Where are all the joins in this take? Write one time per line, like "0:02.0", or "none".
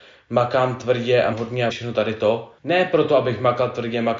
0:01.3
0:01.7
0:02.6